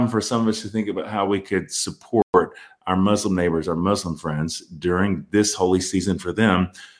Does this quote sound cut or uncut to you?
uncut